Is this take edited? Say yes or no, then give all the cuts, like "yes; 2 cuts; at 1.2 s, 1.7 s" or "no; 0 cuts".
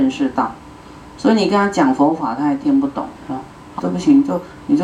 yes; 2 cuts; at 3.2 s, 3.8 s